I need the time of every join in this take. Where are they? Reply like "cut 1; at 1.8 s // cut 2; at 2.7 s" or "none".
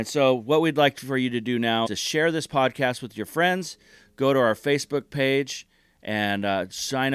cut 1; at 1.9 s